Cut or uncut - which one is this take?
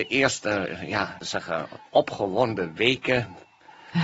cut